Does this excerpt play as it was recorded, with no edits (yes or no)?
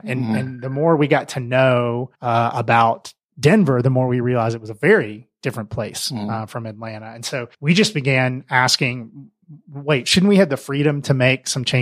no